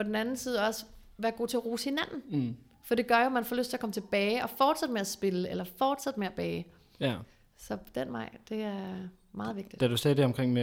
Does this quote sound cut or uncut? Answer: uncut